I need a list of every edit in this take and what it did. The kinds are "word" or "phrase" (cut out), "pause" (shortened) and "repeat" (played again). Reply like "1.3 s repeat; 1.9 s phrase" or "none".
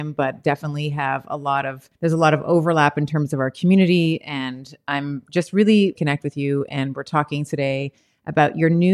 1.9 s pause; 5.9 s phrase